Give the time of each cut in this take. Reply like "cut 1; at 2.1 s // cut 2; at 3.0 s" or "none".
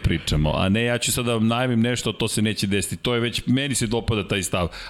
none